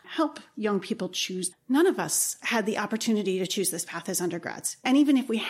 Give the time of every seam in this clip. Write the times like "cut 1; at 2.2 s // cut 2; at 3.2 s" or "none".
cut 1; at 1.5 s